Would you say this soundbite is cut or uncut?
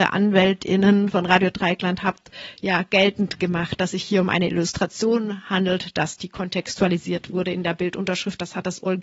cut